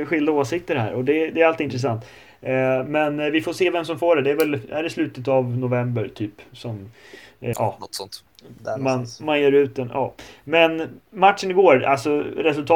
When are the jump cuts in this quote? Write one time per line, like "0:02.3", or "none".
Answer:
0:07.5